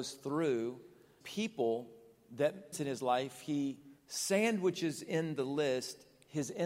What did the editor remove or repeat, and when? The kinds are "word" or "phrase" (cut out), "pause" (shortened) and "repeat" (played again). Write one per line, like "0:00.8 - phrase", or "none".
0:01.2 - word
0:02.7 - phrase
0:04.0 - pause

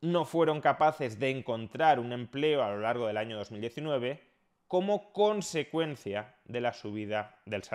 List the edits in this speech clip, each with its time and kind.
none

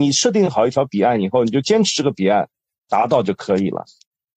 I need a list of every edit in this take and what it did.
none

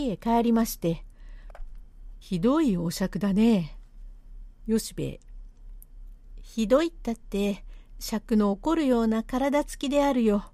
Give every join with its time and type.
0:02.2 - phrase

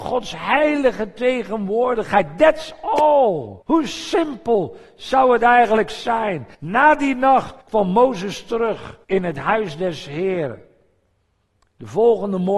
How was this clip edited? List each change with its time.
0:03.6 - pause
0:06.5 - pause
0:07.6 - pause
0:09.0 - pause

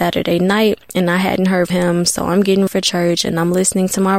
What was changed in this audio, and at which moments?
0:01.7 - word
0:02.7 - word

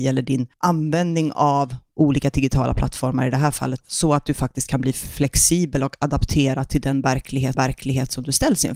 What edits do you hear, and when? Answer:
0:03.8 - word
0:07.5 - repeat

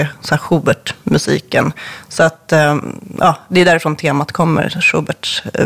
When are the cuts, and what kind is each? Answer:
none

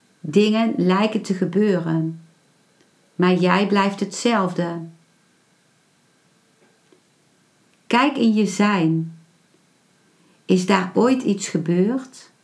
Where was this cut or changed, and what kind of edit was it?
none

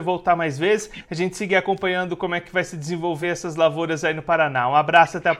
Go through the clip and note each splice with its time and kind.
none

